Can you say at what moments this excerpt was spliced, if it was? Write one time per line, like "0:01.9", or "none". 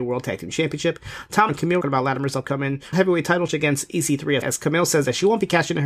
0:01.5
0:01.8
0:02.9
0:03.5
0:04.4